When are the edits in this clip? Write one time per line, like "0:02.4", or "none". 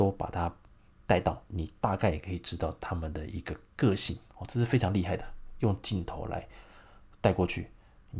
0:01.5
0:04.3